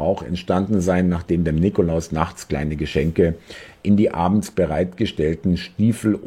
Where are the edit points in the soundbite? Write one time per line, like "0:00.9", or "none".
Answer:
none